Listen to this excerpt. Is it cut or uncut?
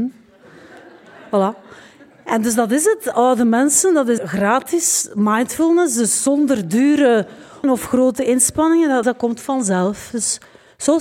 cut